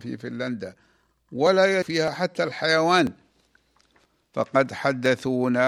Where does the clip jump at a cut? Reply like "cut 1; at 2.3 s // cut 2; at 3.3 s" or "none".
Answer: cut 1; at 1.8 s

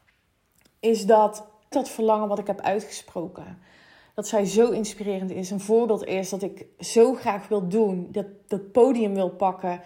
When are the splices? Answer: cut 1; at 1.7 s

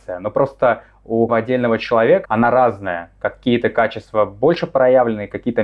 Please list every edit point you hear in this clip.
cut 1; at 1.3 s // cut 2; at 2.2 s

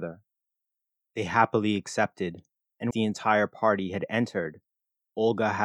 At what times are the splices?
cut 1; at 2.9 s

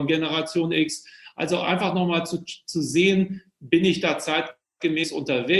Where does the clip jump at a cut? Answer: none

